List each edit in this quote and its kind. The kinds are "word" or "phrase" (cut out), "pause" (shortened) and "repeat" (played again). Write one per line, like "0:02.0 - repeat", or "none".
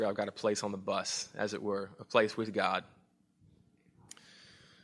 none

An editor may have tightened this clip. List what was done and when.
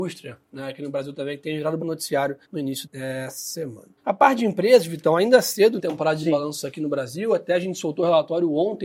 0:01.8 - word
0:02.4 - pause
0:02.8 - word
0:04.0 - pause
0:05.8 - phrase

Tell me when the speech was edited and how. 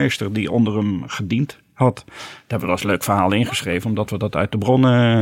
none

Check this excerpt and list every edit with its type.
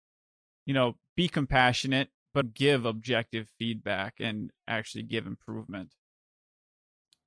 0:02.4 - word

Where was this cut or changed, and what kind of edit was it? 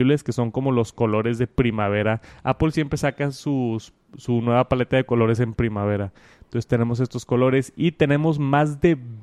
none

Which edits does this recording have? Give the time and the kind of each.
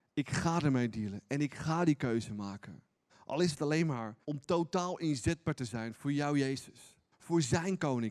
0:03.1 - pause
0:04.2 - pause
0:07.1 - pause

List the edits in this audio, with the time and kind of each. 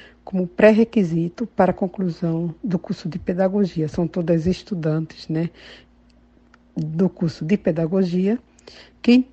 none

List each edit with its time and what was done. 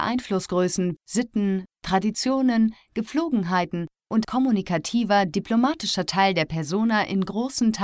0:01.0 - word
0:04.2 - word

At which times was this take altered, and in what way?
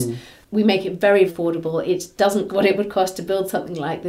0:01.3 - word
0:02.5 - word

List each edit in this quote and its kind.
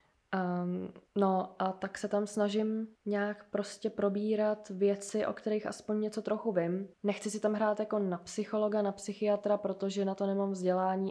0:01.1 - pause
0:02.9 - pause
0:06.9 - pause

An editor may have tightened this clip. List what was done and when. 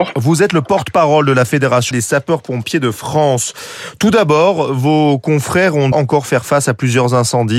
0:01.9 - word
0:05.9 - word

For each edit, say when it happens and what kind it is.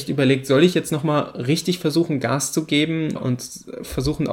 0:03.2 - word

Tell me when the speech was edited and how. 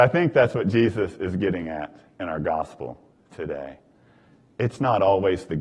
none

